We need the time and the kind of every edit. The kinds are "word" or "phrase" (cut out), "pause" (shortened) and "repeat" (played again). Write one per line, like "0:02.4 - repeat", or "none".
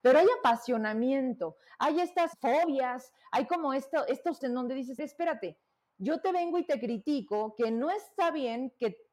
0:02.3 - word
0:04.4 - word
0:05.0 - word